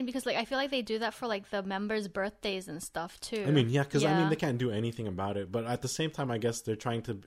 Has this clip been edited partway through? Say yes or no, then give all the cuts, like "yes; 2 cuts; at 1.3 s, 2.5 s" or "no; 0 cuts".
no; 0 cuts